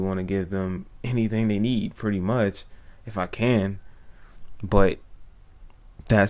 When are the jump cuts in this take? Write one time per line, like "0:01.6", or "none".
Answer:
none